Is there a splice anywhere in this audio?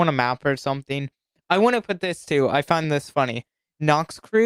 no; 0 cuts

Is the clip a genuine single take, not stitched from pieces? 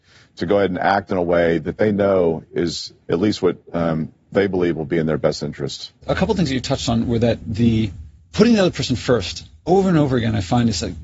no; 3 cuts; at 3.0 s, 3.6 s, 6.0 s

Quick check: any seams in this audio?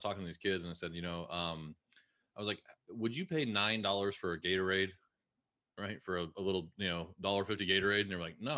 no; 0 cuts

